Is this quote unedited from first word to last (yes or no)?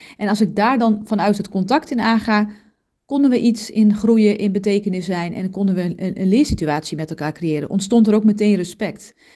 yes